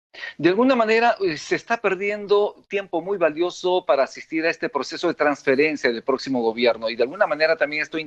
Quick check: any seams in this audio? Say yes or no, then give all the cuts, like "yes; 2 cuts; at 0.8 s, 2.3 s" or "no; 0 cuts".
no; 0 cuts